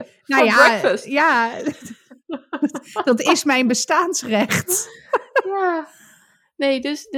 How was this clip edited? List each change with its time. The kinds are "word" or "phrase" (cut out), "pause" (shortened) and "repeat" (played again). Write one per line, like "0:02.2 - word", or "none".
none